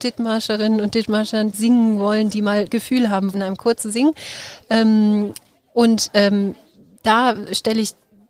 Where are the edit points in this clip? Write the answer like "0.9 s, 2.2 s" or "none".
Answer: 1.5 s, 2.7 s, 3.3 s